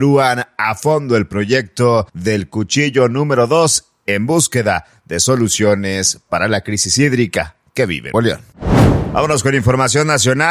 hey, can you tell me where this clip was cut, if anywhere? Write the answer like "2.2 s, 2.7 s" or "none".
2.1 s, 8.1 s